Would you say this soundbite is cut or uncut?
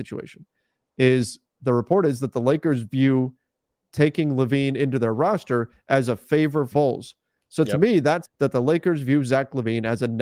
cut